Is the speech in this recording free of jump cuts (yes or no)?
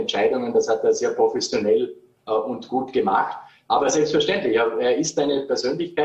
yes